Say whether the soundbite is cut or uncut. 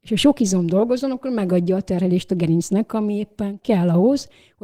uncut